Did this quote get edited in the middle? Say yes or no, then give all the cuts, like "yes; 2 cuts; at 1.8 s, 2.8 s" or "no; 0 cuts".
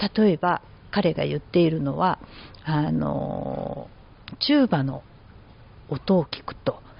no; 0 cuts